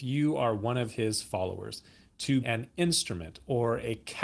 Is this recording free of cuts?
no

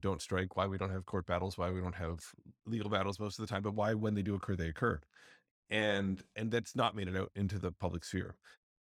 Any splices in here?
no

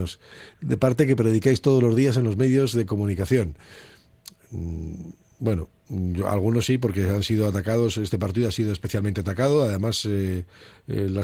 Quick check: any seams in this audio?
no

